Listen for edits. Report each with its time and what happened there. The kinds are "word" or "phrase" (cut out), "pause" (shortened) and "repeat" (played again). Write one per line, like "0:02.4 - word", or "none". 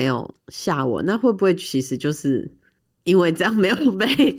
0:02.8 - pause